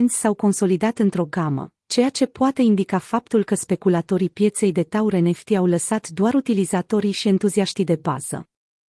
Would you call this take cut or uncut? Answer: uncut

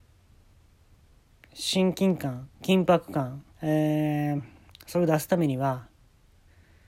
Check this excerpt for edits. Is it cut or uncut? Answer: cut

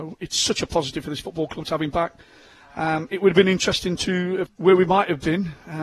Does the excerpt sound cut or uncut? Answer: cut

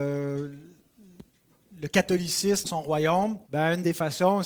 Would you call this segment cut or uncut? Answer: cut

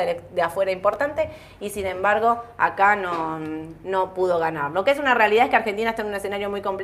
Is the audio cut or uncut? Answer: uncut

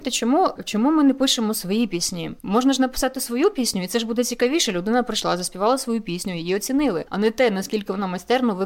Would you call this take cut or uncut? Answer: cut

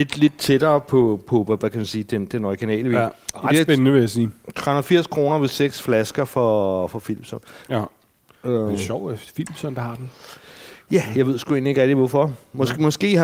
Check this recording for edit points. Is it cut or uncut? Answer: uncut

